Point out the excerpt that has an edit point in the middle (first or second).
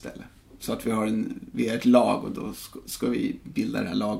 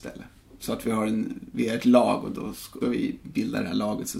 second